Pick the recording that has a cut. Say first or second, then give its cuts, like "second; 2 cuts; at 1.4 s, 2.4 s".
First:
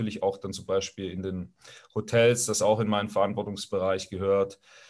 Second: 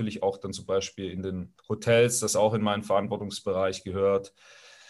second; 1 cut; at 1.6 s